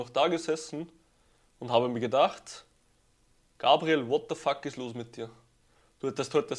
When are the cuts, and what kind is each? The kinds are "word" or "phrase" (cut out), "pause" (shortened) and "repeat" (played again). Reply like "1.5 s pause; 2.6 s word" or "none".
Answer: none